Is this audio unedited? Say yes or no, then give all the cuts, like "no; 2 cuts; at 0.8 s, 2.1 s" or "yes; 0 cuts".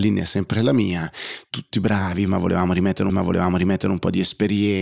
no; 1 cut; at 3.1 s